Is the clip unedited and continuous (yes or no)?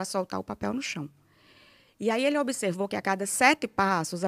yes